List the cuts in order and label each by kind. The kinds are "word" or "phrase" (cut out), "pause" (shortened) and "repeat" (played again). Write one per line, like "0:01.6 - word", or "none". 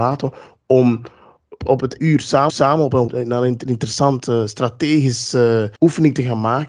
0:01.6 - word
0:02.0 - word
0:02.5 - repeat
0:03.1 - word
0:05.8 - pause